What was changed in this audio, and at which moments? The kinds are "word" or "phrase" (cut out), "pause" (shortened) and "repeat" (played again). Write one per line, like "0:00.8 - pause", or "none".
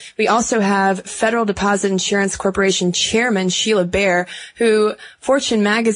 none